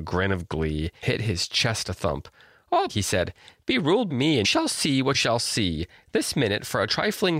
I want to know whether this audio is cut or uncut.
cut